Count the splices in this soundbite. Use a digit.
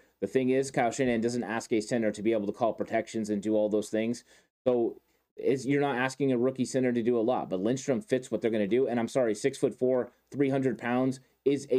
0